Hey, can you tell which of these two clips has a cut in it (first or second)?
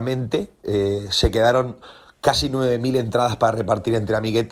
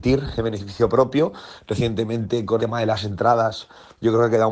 second